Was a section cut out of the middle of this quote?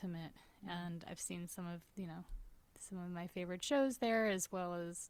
yes; 2 cuts; at 1.9 s, 2.7 s

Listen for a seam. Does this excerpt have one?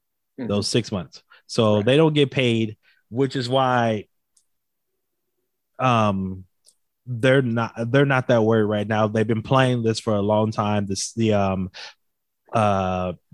no; 0 cuts

